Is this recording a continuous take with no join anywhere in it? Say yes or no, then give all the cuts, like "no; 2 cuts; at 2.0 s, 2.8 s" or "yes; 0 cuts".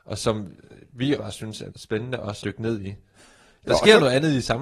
no; 3 cuts; at 1.2 s, 1.7 s, 2.4 s